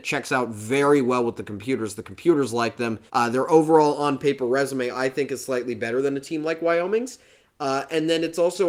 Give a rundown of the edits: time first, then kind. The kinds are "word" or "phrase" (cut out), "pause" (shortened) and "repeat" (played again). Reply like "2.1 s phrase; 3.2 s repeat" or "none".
3.1 s pause